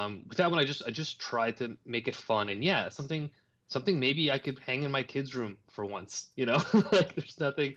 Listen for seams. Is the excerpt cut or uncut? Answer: uncut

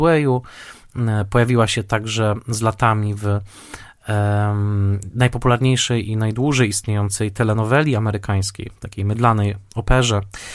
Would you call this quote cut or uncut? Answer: uncut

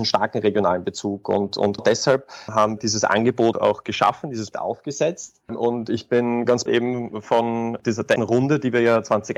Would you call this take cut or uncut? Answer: cut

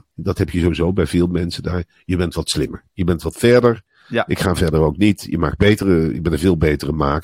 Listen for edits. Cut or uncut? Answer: uncut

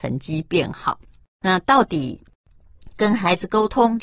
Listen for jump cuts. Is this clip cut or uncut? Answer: uncut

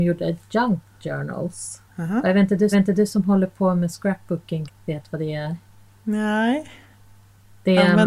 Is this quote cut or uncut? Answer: cut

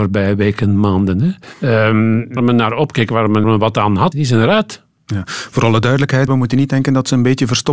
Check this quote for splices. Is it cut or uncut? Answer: cut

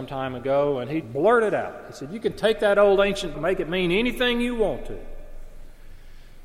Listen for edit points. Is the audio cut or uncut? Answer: cut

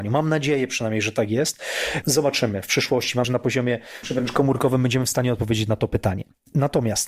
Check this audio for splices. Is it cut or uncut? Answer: cut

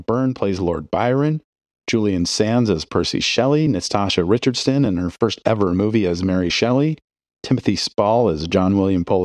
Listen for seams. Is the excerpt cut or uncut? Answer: uncut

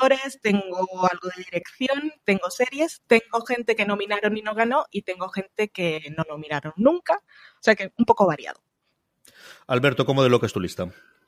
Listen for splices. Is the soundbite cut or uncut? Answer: uncut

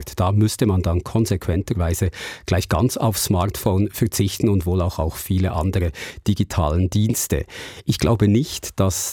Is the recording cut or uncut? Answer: uncut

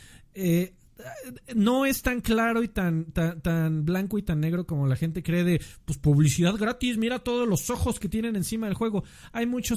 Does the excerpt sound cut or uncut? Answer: uncut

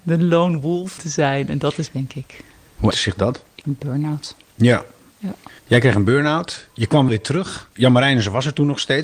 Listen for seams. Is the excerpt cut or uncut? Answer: cut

